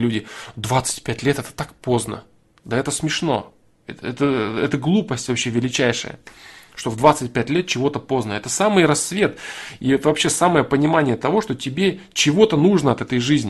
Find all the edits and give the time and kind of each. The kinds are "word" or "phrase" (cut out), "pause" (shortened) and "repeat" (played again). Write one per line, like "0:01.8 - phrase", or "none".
none